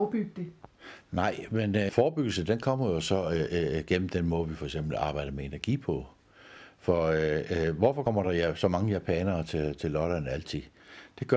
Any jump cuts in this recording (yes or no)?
no